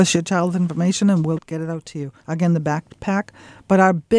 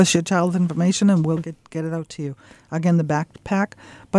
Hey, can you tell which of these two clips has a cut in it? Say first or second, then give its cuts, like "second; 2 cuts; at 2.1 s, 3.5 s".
first; 2 cuts; at 1.4 s, 2.2 s